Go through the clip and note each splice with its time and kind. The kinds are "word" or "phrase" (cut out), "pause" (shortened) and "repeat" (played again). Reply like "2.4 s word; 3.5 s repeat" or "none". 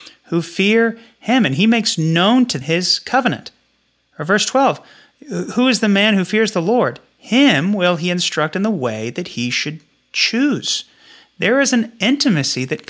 2.6 s word